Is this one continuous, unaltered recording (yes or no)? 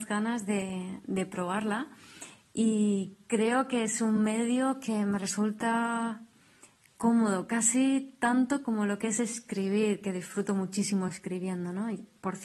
yes